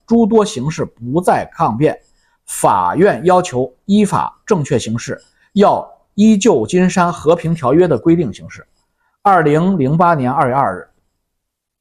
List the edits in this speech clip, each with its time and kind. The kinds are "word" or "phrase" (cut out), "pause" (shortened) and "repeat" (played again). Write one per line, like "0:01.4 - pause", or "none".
none

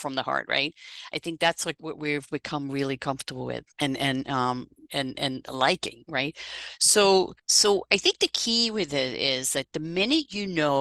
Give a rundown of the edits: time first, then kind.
0:03.7 - pause
0:07.4 - pause

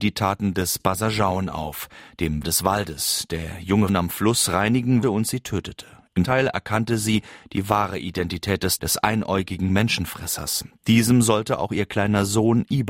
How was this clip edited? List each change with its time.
0:02.4 - word
0:03.9 - word
0:05.0 - word
0:06.2 - word
0:08.8 - word

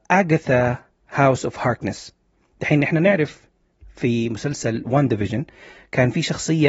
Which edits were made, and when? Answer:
none

